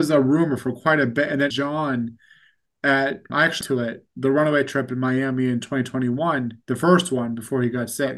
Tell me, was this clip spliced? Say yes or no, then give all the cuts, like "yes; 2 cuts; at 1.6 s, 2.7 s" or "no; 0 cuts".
yes; 4 cuts; at 1.5 s, 3.3 s, 3.6 s, 6.6 s